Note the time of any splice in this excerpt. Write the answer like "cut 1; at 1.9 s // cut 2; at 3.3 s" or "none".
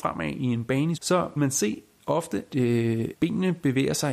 cut 1; at 1.0 s // cut 2; at 1.4 s // cut 3; at 2.5 s // cut 4; at 3.1 s